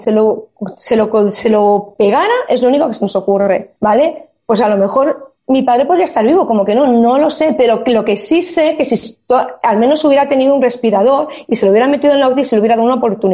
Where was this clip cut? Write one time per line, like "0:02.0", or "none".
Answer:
0:03.8
0:05.4